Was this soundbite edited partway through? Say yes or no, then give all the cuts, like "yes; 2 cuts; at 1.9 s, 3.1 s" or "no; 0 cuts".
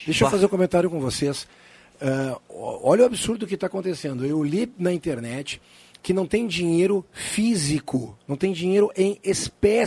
no; 0 cuts